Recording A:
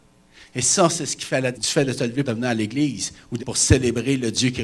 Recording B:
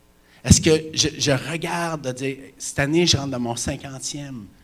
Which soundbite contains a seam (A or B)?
A